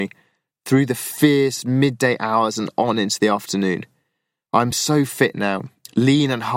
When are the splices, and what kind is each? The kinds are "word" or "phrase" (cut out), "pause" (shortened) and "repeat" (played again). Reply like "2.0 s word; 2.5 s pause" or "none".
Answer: none